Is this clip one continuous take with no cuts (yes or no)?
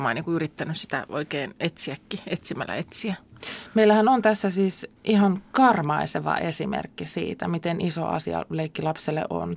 no